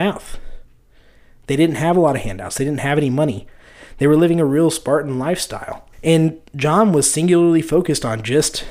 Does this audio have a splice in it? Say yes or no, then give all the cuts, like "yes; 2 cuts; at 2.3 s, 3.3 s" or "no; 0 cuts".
yes; 1 cut; at 5.9 s